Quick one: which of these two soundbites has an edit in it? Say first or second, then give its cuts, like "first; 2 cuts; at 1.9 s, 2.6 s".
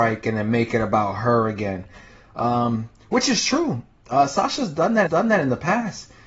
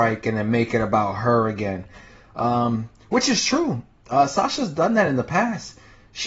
first; 1 cut; at 5.1 s